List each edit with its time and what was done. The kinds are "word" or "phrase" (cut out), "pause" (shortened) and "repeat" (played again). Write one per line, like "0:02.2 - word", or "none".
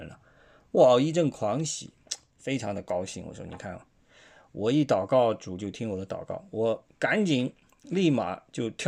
none